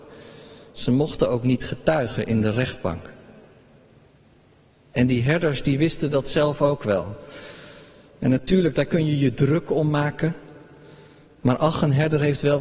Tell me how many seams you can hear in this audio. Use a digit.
0